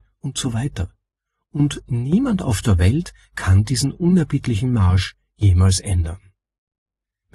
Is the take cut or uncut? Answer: uncut